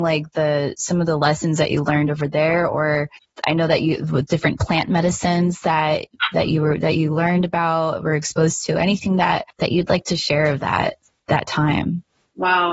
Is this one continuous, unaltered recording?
no; 1 cut; at 6.3 s

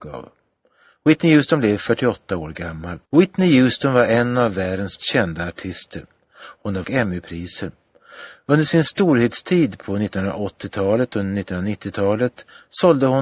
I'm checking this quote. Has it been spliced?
yes; 3 cuts; at 3.1 s, 5.0 s, 6.8 s

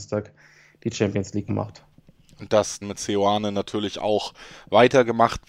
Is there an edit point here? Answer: yes; 2 cuts; at 1.5 s, 2.8 s

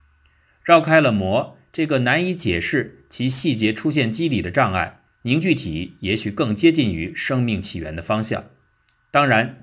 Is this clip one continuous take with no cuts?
no; 1 cut; at 5.1 s

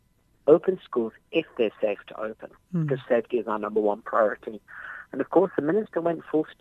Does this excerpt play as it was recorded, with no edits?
yes; 0 cuts

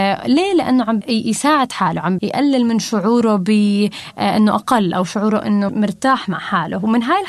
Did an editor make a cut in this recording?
yes; 3 cuts; at 1.0 s, 2.2 s, 5.7 s

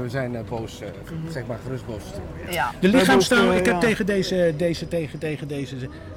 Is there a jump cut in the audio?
no; 0 cuts

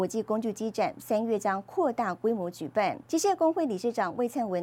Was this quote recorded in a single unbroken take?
no; 1 cut; at 3.1 s

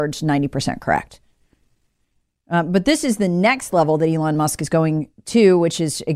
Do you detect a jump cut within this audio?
no; 0 cuts

